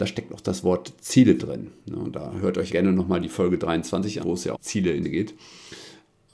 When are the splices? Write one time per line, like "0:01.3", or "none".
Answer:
0:01.4
0:02.7
0:04.2
0:04.5
0:05.0